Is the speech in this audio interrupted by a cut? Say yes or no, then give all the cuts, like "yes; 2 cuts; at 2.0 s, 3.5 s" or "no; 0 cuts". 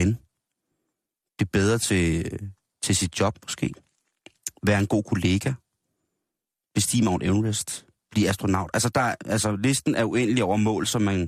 no; 0 cuts